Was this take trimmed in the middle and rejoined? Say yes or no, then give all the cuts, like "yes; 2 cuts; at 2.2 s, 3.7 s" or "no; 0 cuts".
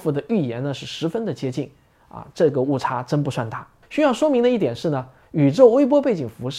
yes; 1 cut; at 3.8 s